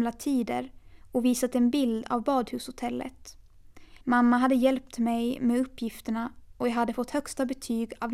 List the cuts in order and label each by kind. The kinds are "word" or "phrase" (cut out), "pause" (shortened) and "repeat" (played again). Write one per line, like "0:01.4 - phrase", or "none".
0:04.0 - pause